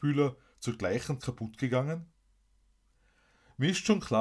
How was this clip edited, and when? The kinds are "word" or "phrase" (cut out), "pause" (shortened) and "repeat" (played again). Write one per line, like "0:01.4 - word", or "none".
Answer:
0:01.2 - word